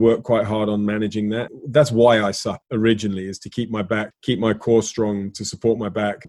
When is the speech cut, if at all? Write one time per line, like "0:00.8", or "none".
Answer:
0:02.6